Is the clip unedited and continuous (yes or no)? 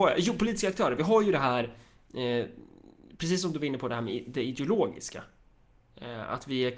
yes